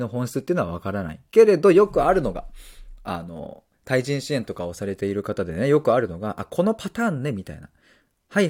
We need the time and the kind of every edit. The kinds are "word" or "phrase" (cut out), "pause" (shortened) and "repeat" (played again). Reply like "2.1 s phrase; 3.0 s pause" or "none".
3.7 s pause